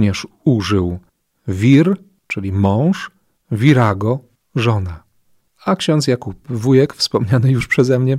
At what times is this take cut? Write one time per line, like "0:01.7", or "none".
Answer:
none

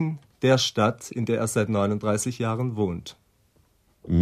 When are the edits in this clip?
none

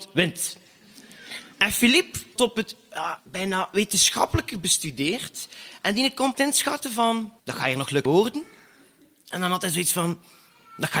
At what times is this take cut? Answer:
0:01.5
0:02.4
0:03.2
0:06.3
0:07.4
0:08.1

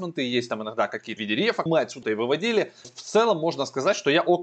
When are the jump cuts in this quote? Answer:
0:01.2
0:01.7
0:02.0
0:02.8

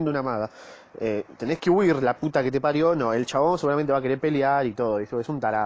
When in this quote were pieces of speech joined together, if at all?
none

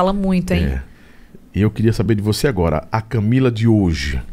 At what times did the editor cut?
none

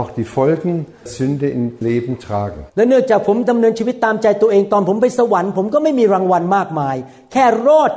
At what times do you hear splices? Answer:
0:01.1
0:01.8
0:02.7

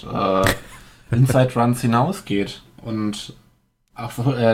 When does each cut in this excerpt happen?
none

